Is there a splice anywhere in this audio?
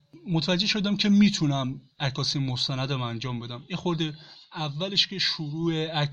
yes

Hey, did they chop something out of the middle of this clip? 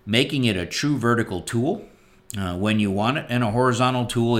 no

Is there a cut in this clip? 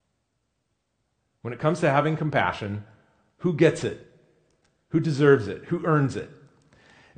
no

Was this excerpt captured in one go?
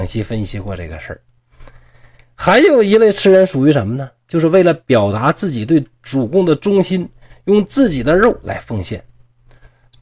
yes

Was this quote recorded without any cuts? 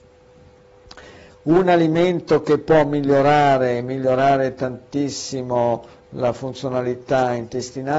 yes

